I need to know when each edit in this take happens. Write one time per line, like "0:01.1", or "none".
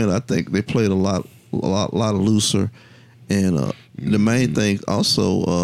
none

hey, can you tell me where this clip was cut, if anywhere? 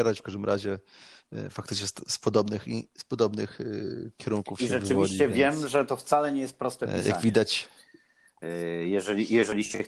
none

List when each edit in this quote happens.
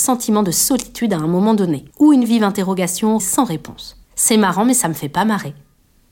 0:01.9
0:03.2
0:04.0

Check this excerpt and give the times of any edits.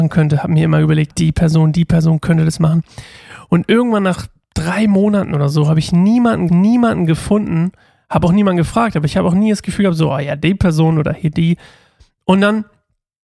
0:01.1
0:06.5

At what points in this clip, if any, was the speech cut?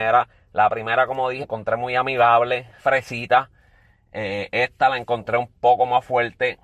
0:01.4
0:02.8

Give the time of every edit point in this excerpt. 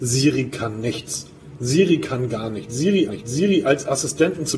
0:03.1

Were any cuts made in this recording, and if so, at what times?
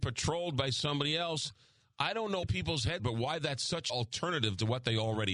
0:02.4
0:03.0
0:03.9

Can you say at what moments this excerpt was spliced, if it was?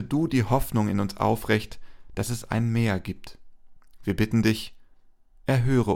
none

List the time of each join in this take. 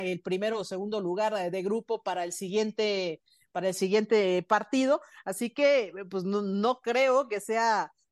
none

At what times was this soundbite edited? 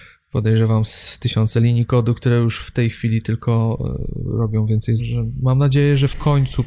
0:05.0

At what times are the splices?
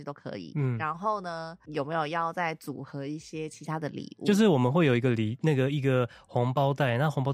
none

